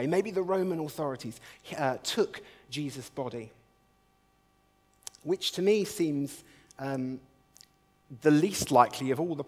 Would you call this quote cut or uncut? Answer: uncut